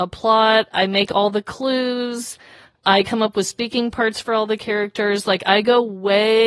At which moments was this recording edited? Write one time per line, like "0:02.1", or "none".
none